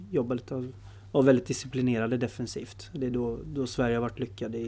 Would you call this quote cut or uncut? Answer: uncut